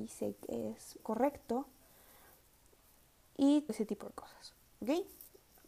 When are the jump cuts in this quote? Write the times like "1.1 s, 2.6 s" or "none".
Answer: 1.0 s, 3.7 s